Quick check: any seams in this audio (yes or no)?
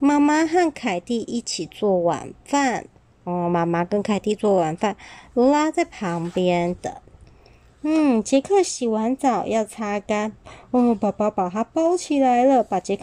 no